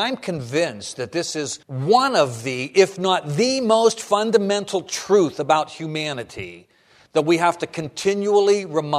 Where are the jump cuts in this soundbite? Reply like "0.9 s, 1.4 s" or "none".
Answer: 1.6 s